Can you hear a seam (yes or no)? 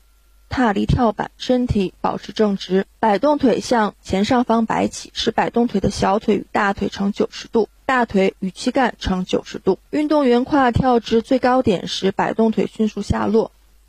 yes